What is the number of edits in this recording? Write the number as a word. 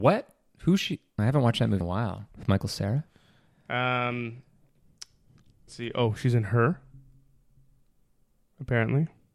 four